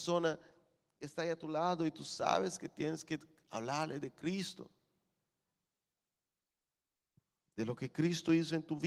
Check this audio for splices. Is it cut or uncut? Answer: uncut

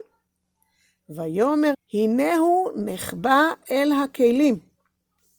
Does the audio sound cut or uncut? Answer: cut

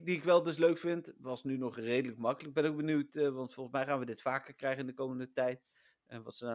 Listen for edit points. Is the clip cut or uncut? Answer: uncut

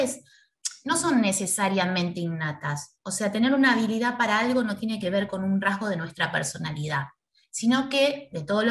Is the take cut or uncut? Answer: uncut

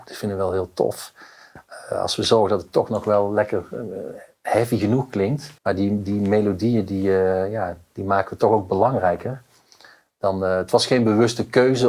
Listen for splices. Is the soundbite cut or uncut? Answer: cut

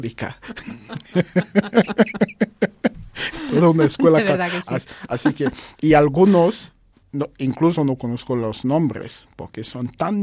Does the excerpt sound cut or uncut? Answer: cut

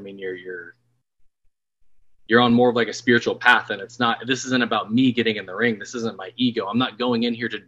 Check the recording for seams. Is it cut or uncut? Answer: uncut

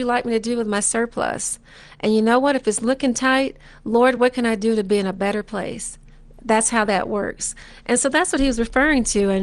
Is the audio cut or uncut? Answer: uncut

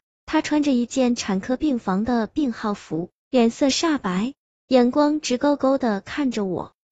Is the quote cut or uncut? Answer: uncut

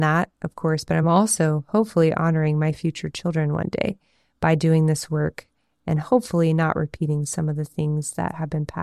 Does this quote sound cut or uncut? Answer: uncut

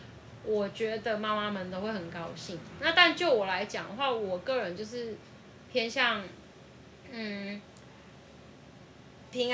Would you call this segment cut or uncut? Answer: uncut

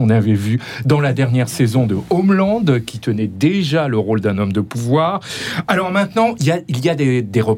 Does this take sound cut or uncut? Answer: uncut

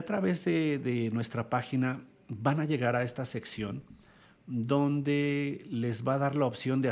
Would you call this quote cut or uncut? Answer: uncut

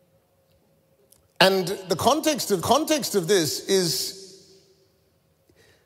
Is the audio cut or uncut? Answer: cut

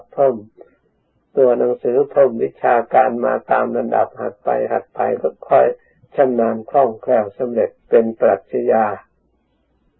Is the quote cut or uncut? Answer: cut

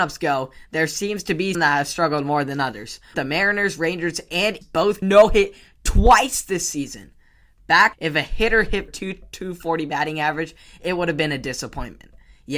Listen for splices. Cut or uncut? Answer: cut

